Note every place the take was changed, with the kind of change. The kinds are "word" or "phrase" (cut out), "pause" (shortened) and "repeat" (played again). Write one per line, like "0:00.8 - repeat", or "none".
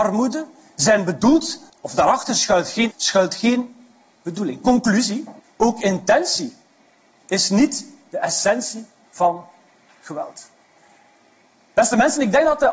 0:01.7 - word
0:02.9 - word
0:05.4 - pause
0:09.0 - pause